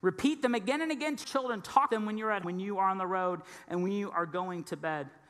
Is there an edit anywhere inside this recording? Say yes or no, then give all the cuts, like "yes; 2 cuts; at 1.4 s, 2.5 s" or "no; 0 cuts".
yes; 3 cuts; at 1.2 s, 1.9 s, 2.4 s